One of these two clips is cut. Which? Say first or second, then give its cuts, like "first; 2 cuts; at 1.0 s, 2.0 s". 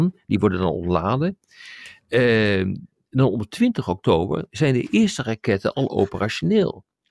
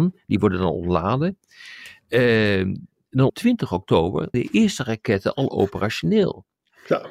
second; 2 cuts; at 3.3 s, 4.3 s